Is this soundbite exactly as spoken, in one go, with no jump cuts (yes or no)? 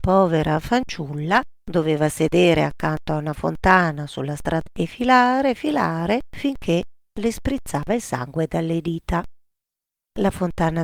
no